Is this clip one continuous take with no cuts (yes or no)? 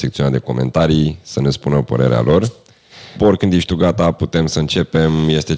yes